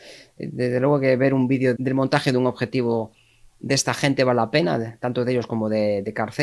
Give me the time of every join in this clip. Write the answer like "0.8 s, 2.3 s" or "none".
1.8 s